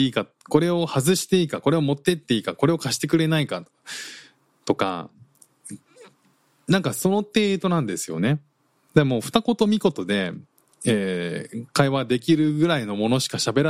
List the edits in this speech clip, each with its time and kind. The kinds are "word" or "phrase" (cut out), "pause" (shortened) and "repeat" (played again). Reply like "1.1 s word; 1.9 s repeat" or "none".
none

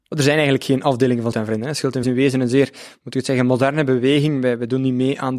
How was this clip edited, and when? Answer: 1.3 s word; 2.0 s phrase

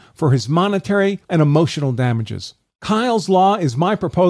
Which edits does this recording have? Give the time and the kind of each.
1.2 s word

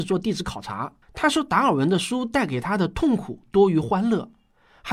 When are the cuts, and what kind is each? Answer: 1.0 s pause

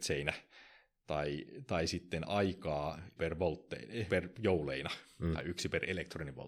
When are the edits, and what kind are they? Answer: 3.2 s word; 4.1 s word

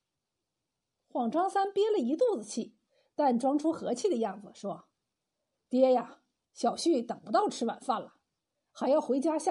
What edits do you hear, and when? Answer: none

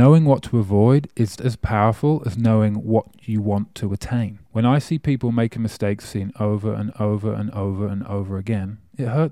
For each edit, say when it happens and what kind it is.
1.4 s word; 4.5 s pause; 6.0 s word; 6.9 s repeat

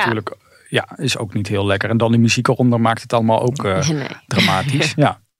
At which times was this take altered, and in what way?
none

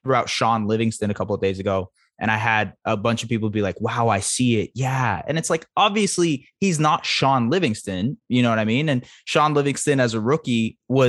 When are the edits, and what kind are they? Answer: none

